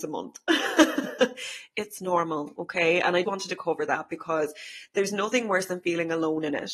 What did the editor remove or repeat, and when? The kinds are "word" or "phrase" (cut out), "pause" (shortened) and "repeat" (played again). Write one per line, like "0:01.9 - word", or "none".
0:03.2 - word